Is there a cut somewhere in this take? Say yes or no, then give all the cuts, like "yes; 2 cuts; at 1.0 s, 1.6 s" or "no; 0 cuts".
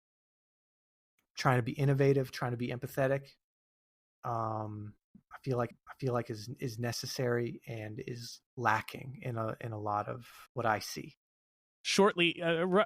yes; 3 cuts; at 5.7 s, 8.5 s, 10.5 s